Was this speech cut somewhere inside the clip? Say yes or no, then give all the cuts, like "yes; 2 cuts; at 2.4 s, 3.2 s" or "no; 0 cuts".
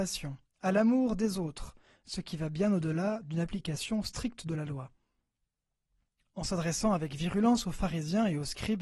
no; 0 cuts